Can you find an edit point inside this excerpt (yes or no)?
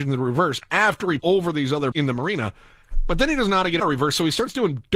yes